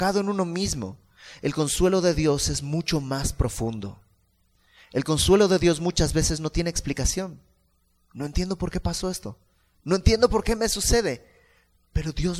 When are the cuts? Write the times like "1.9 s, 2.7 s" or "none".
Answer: none